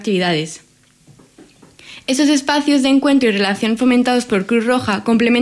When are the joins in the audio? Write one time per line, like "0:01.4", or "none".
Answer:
none